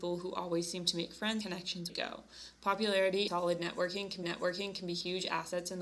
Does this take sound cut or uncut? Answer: cut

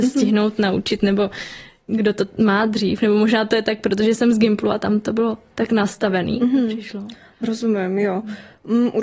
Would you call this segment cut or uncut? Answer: uncut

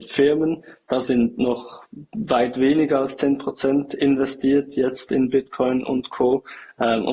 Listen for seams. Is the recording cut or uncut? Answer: uncut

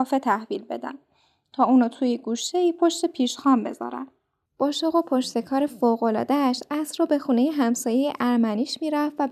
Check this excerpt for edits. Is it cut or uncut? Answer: uncut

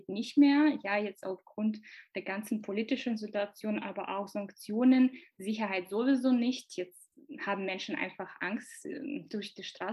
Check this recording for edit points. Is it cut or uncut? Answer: uncut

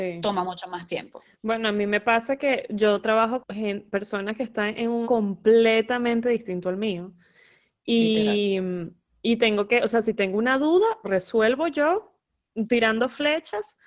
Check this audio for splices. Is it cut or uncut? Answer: cut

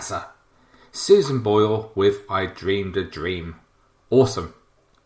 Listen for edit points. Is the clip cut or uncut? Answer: uncut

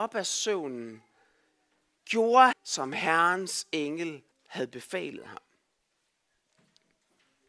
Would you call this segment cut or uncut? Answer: cut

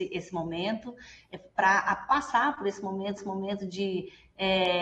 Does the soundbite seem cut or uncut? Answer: cut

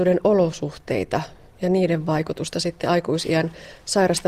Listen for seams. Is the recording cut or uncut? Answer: uncut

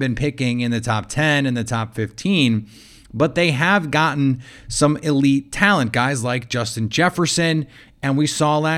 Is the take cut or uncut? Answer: uncut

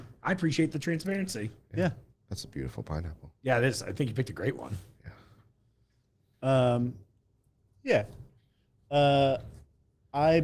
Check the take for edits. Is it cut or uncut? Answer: uncut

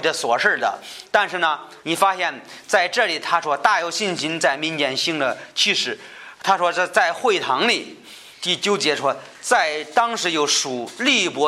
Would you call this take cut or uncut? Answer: cut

